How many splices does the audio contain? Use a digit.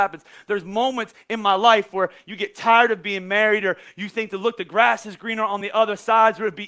0